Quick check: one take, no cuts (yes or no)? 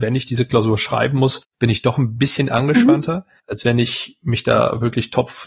no